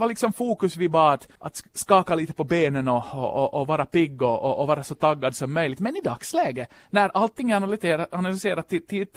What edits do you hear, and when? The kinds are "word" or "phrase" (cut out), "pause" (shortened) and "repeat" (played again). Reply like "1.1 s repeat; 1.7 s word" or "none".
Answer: 1.4 s pause